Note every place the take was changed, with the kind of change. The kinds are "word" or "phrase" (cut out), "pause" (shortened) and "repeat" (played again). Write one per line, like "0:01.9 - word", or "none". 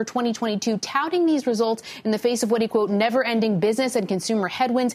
0:02.7 - word